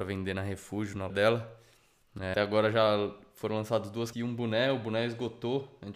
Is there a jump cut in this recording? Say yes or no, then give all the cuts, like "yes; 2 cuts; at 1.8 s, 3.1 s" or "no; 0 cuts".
yes; 3 cuts; at 1.1 s, 2.3 s, 4.1 s